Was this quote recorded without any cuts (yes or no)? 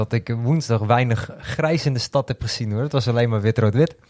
yes